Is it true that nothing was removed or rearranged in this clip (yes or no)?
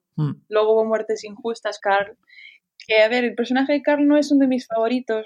no